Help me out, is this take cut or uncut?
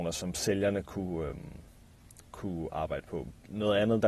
uncut